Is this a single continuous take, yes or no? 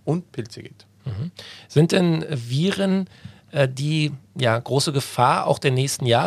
yes